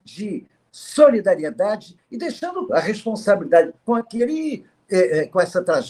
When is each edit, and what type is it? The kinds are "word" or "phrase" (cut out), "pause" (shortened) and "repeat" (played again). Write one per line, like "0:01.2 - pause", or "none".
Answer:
0:02.7 - word
0:03.8 - word